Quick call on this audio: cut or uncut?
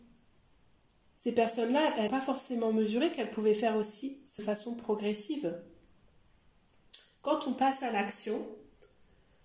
cut